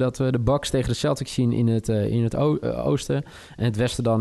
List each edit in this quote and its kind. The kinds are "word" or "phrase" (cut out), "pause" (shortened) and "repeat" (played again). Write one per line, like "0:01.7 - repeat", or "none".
none